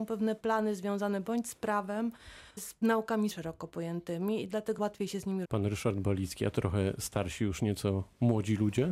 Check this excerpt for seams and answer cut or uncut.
cut